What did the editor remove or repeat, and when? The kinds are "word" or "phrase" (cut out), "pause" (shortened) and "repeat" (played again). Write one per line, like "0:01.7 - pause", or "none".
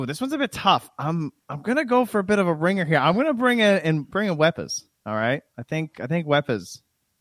none

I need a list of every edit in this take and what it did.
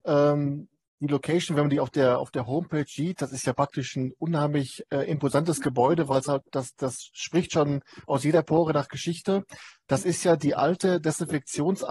none

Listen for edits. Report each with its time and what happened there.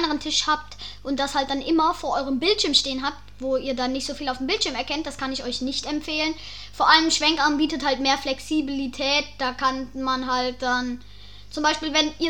none

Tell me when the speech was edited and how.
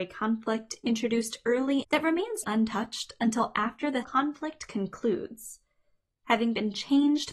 0:01.8 - phrase
0:02.4 - word
0:04.0 - word

